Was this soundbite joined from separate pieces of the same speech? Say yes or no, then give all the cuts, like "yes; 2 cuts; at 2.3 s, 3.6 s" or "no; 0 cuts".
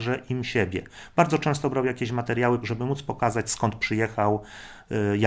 no; 0 cuts